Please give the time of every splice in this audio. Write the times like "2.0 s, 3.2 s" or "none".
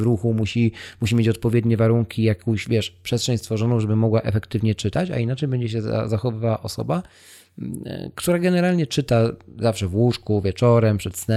none